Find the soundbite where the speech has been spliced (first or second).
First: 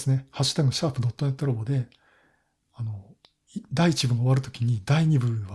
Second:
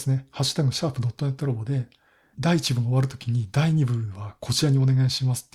second